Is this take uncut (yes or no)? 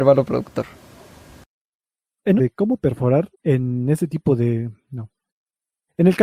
no